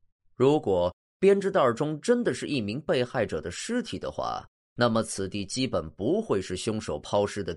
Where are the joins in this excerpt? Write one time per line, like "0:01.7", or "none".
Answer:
none